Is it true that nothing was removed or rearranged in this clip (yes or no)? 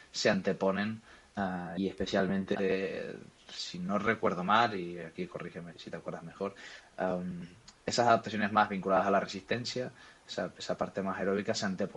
no